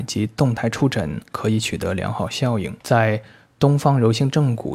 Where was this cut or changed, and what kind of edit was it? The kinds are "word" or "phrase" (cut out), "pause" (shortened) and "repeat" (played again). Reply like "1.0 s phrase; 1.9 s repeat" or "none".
2.8 s pause